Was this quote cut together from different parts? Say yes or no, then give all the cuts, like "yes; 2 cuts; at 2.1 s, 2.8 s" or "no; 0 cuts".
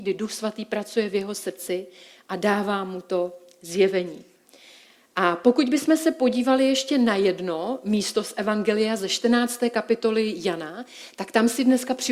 no; 0 cuts